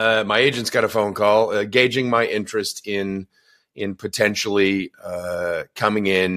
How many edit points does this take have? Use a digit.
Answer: 0